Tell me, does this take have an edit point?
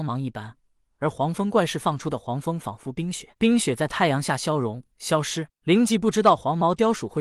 yes; 2 cuts; at 3.3 s, 4.9 s

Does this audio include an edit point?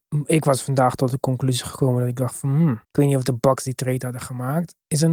yes; 1 cut; at 2.8 s

